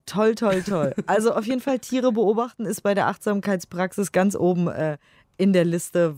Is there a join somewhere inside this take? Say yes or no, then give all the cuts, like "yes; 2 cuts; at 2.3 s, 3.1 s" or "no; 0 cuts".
no; 0 cuts